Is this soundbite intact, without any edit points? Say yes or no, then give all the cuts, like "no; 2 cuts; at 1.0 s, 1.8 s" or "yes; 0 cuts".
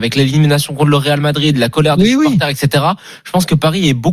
yes; 0 cuts